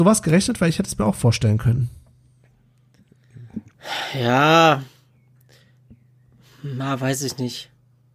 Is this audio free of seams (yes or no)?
yes